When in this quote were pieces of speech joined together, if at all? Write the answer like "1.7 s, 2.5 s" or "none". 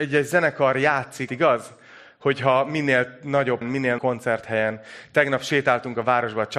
1.3 s, 3.6 s, 4.0 s